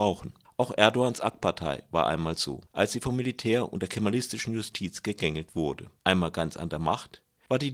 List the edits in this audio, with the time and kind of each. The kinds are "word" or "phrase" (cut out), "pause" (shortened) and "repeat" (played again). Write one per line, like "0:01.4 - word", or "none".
0:02.7 - pause
0:06.0 - pause